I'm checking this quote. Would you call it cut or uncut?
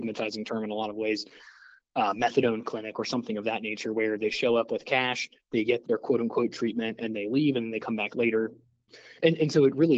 cut